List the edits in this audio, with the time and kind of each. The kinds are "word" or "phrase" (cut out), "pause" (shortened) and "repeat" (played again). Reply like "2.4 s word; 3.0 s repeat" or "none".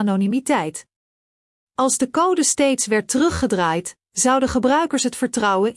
none